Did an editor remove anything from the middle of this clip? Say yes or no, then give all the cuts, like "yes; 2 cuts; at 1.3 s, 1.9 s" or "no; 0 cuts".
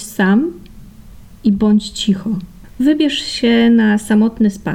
no; 0 cuts